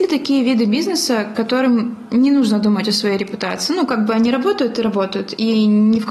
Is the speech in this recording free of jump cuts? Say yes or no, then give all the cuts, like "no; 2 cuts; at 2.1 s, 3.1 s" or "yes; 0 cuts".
yes; 0 cuts